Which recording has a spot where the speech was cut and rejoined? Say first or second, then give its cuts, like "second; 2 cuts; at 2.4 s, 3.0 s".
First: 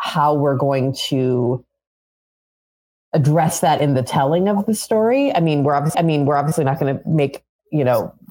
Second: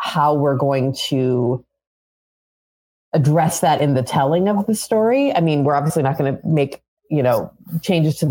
first; 1 cut; at 5.9 s